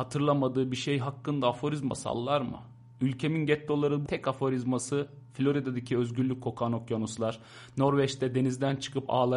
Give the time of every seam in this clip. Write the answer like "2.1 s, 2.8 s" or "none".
4.1 s